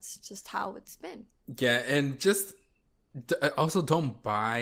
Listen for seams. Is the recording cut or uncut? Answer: uncut